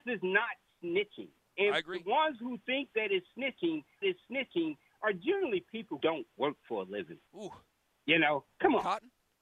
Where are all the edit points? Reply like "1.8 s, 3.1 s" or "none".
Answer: 1.4 s, 4.0 s, 6.0 s, 7.3 s